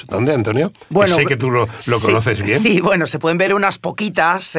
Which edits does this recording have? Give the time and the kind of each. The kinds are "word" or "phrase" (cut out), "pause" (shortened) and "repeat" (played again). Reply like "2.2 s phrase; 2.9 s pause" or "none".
none